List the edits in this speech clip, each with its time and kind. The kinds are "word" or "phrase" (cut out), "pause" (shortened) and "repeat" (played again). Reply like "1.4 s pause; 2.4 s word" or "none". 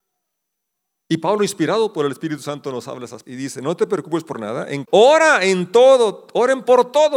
3.2 s word; 4.8 s word